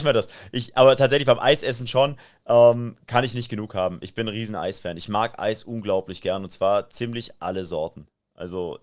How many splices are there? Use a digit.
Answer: 0